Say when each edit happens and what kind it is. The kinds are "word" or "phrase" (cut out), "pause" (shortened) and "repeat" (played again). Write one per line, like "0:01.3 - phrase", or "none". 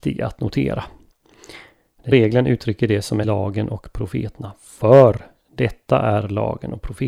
0:02.1 - word
0:03.2 - phrase